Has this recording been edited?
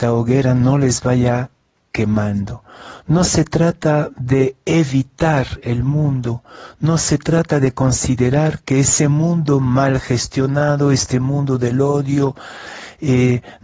no; 0 cuts

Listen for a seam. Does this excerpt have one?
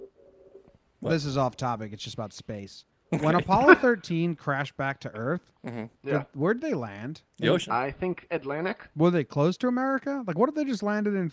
yes; 4 cuts; at 5.6 s, 5.9 s, 7.3 s, 8.9 s

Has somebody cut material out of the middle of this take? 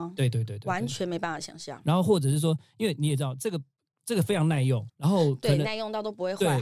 yes; 1 cut; at 4.9 s

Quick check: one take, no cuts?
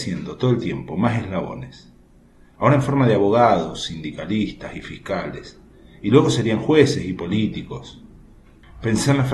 yes; 0 cuts

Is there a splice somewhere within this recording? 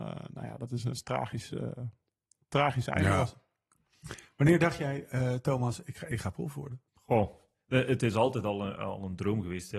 yes; 2 cuts; at 0.9 s, 6.9 s

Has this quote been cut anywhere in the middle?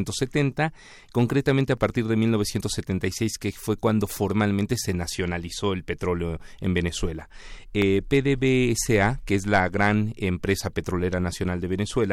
no; 0 cuts

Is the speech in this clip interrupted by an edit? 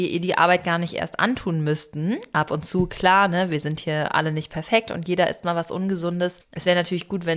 no; 0 cuts

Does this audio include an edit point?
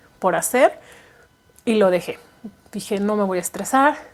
no; 0 cuts

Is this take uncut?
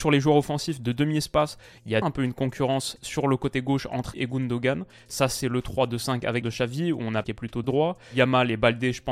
no; 5 cuts; at 2.0 s, 4.1 s, 6.4 s, 7.2 s, 7.6 s

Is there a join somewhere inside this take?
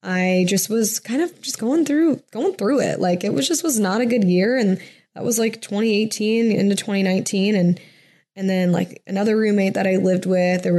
no; 0 cuts

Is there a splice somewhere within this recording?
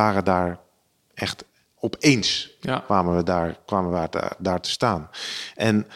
no; 0 cuts

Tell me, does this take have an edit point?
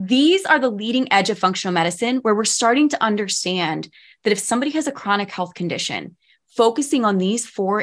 no; 0 cuts

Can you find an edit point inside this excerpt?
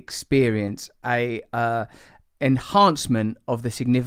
no; 0 cuts

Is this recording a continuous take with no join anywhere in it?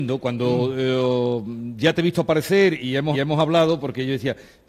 no; 1 cut; at 3.1 s

